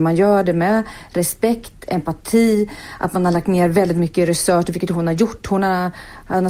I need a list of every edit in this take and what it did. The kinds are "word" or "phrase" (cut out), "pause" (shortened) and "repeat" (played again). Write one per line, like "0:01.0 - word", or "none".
none